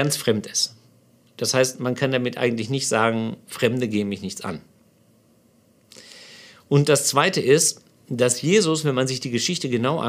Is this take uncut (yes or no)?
yes